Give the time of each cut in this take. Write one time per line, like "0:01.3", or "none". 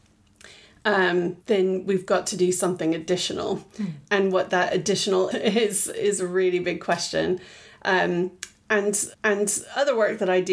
0:01.4
0:05.3
0:09.1